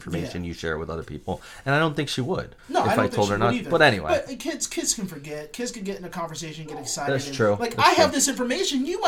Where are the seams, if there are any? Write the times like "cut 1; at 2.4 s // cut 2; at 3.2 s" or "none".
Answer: cut 1; at 2.6 s